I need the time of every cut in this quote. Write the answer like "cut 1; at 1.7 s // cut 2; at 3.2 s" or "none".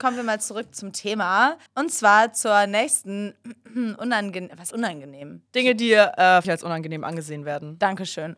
cut 1; at 1.7 s // cut 2; at 4.7 s // cut 3; at 5.5 s // cut 4; at 6.4 s